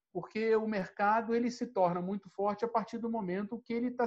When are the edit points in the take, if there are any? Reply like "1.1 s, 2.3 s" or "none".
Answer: none